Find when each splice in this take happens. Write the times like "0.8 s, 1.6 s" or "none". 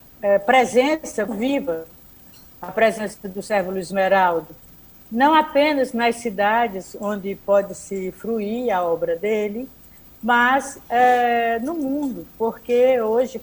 1.2 s